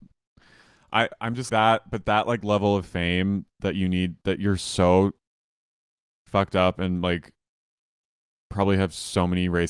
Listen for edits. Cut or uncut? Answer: cut